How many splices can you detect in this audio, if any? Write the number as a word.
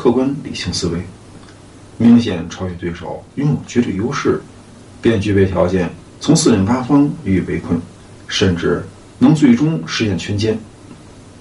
one